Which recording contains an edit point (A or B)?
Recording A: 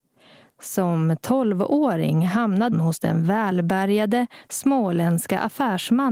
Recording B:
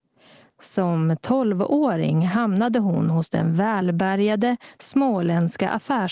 A